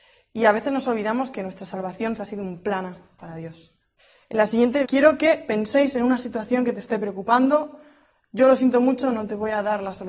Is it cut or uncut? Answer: cut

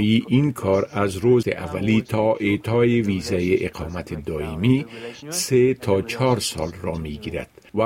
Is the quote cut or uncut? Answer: cut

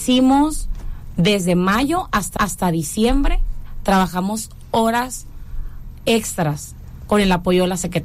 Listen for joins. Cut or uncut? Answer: cut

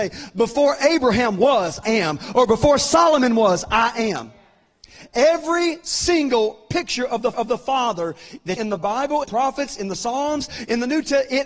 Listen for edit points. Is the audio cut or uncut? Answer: cut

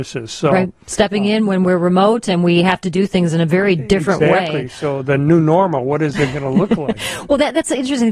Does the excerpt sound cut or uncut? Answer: uncut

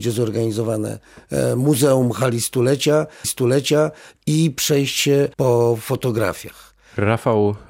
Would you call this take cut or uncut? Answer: cut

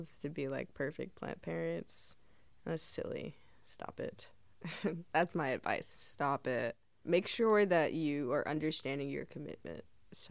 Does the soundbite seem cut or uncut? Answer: uncut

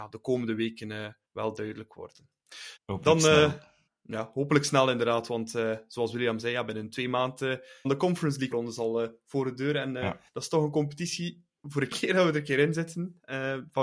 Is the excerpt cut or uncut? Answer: cut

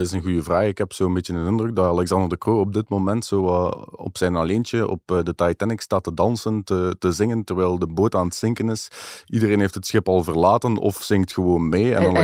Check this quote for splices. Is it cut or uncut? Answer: uncut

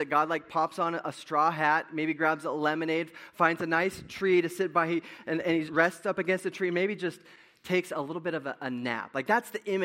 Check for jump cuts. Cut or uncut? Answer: cut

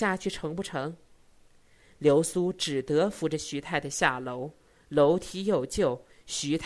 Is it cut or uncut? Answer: uncut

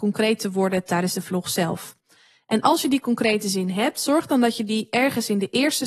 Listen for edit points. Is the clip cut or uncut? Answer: uncut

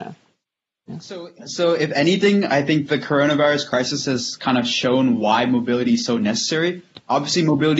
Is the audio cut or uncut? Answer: uncut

